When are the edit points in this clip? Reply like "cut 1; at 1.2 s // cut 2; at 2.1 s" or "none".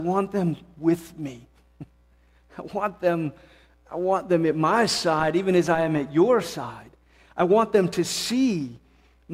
none